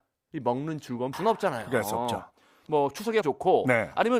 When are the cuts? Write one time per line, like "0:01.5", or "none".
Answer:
0:01.1
0:02.7
0:03.2